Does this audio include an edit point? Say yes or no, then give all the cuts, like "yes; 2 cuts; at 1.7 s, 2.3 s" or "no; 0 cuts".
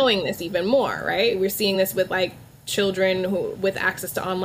no; 0 cuts